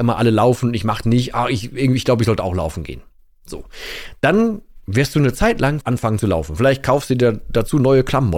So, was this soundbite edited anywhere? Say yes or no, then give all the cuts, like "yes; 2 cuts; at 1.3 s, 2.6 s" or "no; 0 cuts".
yes; 2 cuts; at 1.0 s, 5.8 s